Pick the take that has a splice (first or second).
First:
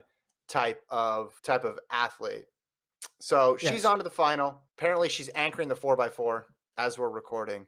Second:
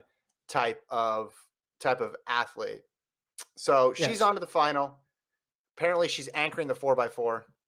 first